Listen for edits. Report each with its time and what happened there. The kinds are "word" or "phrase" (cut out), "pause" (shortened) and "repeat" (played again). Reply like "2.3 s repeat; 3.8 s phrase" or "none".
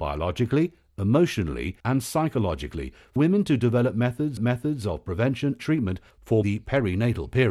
1.8 s pause; 3.2 s word; 4.4 s repeat; 5.6 s word; 6.4 s phrase